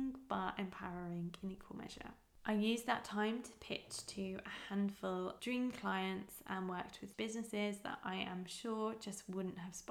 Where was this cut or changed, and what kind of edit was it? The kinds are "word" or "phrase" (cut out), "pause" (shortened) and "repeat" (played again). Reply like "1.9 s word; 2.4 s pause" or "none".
5.4 s word; 7.1 s phrase